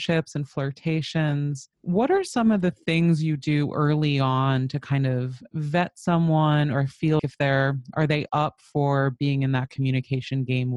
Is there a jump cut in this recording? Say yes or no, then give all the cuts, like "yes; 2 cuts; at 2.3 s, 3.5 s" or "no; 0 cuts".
yes; 2 cuts; at 1.7 s, 7.2 s